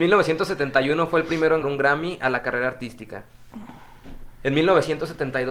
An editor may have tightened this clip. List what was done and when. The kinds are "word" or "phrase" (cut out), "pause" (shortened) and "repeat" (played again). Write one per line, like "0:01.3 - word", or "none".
0:01.6 - word